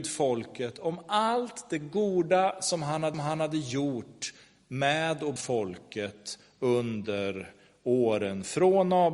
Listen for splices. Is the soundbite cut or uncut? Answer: cut